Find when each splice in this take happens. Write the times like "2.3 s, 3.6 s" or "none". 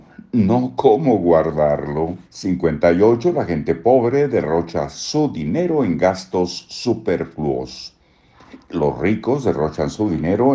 2.2 s